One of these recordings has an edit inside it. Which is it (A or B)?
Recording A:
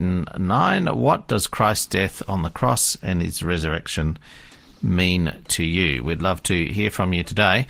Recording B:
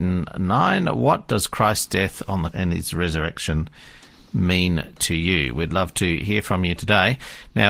B